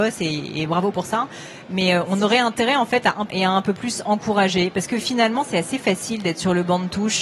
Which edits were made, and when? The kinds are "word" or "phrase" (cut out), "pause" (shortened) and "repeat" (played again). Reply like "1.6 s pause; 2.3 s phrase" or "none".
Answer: 3.3 s phrase